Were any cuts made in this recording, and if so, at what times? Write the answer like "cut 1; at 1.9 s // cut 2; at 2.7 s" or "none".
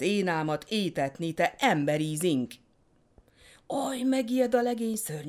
none